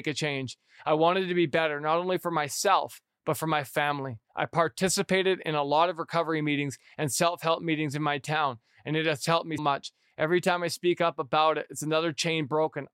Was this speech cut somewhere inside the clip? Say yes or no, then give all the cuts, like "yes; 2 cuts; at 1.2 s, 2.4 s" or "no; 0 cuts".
yes; 2 cuts; at 4.2 s, 9.6 s